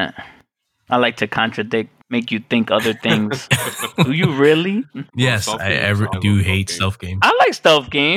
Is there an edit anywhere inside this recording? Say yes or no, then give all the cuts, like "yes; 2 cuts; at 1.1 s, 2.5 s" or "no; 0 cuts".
yes; 3 cuts; at 2.0 s, 5.1 s, 6.1 s